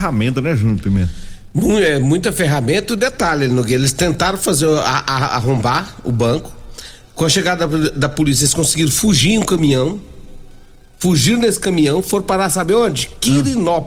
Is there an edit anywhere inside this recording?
no; 0 cuts

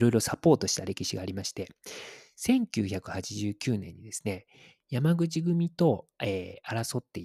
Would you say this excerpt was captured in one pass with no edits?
yes; 0 cuts

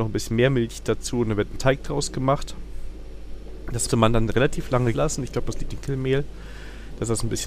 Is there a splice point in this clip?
yes; 3 cuts; at 3.9 s, 4.9 s, 5.7 s

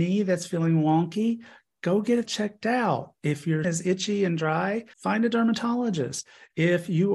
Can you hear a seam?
yes; 3 cuts; at 2.3 s, 3.6 s, 4.9 s

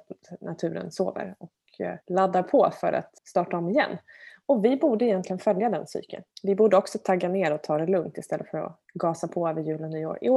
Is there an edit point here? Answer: yes; 4 cuts; at 2.0 s, 3.2 s, 6.3 s, 8.8 s

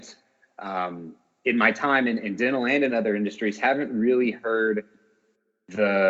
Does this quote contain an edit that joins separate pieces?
no; 0 cuts

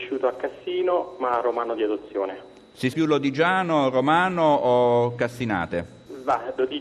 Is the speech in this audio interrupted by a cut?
yes; 1 cut; at 2.9 s

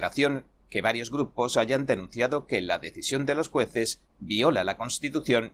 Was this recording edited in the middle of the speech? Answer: no; 0 cuts

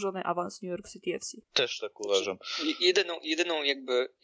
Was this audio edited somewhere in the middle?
yes; 1 cut; at 1.4 s

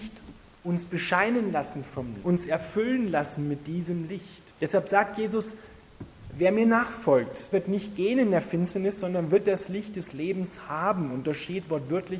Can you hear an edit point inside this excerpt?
yes; 3 cuts; at 2.2 s, 4.5 s, 7.5 s

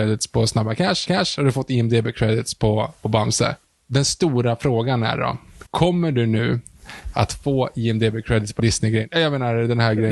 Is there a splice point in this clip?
yes; 4 cuts; at 1.1 s, 3.6 s, 5.7 s, 8.6 s

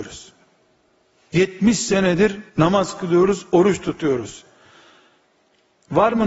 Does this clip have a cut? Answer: yes; 1 cut; at 2.5 s

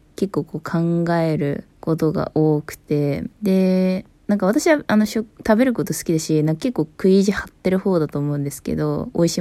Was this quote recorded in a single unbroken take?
no; 2 cuts; at 1.7 s, 3.3 s

